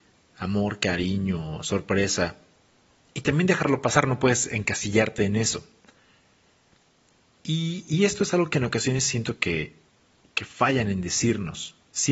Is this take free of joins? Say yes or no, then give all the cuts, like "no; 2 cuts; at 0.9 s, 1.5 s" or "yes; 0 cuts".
yes; 0 cuts